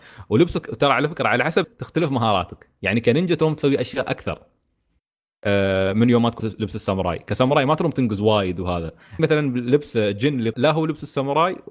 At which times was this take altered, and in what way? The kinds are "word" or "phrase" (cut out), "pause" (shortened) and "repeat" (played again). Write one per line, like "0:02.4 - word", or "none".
0:01.6 - word
0:06.4 - word
0:09.2 - word
0:10.5 - word

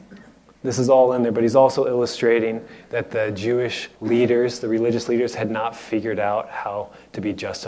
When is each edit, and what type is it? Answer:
0:04.0 - pause

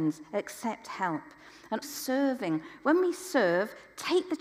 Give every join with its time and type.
0:01.8 - word

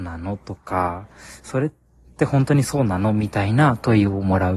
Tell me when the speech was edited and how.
none

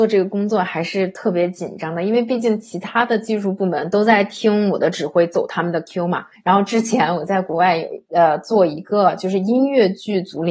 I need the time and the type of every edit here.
0:06.4 - pause

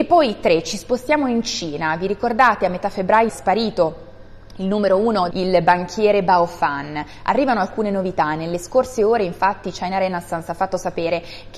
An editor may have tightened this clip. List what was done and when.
0:03.3 - word
0:05.3 - phrase

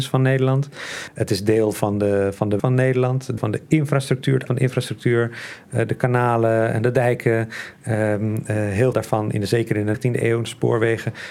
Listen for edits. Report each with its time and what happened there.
0:02.6 - word
0:03.4 - word
0:04.5 - word
0:08.9 - word
0:09.9 - word

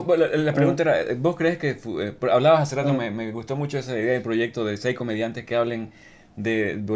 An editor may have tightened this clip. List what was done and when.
none

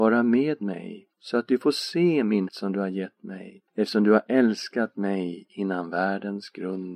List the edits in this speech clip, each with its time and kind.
0:01.1 - pause
0:02.5 - word
0:03.7 - pause

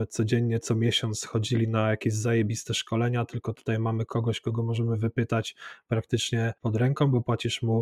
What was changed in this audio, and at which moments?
0:06.6 - pause

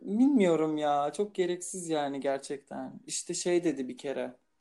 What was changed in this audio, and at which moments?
none

